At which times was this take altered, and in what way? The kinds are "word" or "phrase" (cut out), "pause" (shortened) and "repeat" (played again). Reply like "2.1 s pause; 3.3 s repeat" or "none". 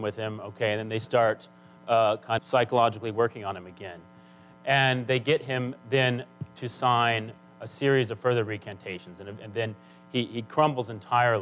2.4 s word